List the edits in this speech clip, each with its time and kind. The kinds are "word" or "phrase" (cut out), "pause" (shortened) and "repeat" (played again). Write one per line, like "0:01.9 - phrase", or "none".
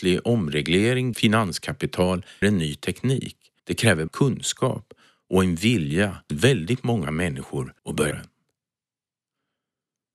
0:01.1 - word
0:02.4 - word
0:03.6 - pause
0:04.1 - word
0:06.3 - word
0:07.8 - pause
0:08.1 - word